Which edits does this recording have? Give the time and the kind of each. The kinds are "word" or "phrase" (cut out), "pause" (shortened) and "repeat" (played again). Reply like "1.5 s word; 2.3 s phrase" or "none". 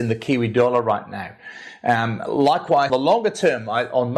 2.9 s word